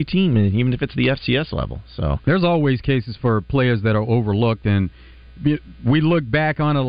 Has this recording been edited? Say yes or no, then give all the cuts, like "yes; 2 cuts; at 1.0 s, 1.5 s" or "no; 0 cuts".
no; 0 cuts